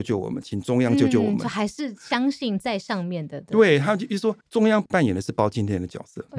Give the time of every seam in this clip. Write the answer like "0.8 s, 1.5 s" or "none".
4.4 s